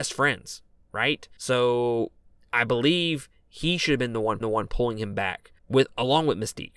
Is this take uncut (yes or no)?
no